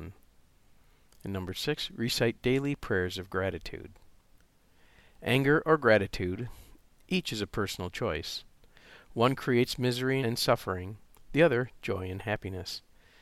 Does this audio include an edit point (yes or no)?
no